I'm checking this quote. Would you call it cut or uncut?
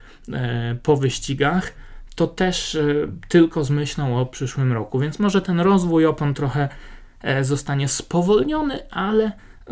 uncut